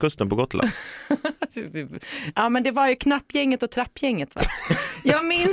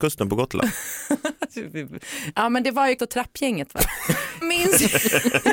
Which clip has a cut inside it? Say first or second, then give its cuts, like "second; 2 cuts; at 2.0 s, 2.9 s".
second; 2 cuts; at 3.0 s, 4.4 s